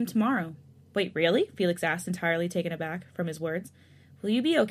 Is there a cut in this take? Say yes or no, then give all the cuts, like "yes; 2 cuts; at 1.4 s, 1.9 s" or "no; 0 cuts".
no; 0 cuts